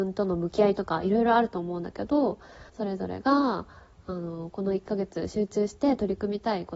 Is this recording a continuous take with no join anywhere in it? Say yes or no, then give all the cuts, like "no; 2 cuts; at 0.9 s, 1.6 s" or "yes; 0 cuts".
no; 1 cut; at 2.7 s